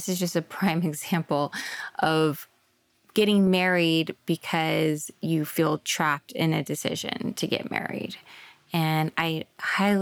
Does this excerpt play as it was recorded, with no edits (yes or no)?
yes